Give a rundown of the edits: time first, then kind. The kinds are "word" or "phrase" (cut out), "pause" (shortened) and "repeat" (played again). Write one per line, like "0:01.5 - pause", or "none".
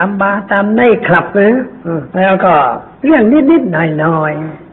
0:02.1 - pause
0:02.9 - pause